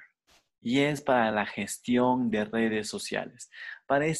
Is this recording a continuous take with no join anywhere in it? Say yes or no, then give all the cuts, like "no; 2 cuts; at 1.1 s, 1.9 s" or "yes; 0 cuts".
yes; 0 cuts